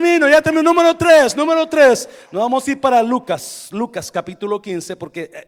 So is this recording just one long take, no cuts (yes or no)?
yes